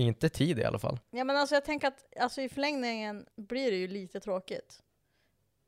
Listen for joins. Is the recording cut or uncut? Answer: cut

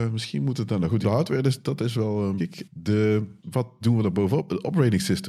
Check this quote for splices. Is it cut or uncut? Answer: cut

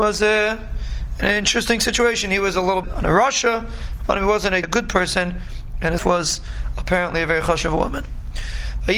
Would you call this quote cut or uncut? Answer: cut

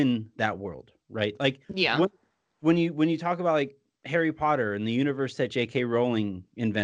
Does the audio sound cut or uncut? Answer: cut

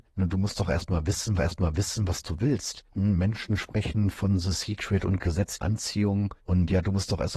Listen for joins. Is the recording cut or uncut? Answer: cut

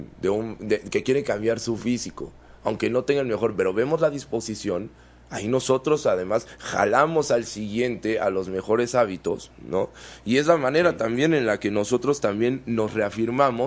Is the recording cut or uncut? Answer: uncut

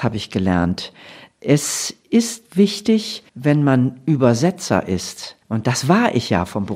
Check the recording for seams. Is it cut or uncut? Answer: cut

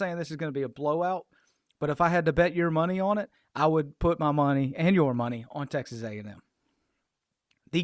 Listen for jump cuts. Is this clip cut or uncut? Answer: uncut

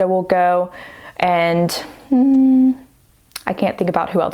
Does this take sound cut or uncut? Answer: cut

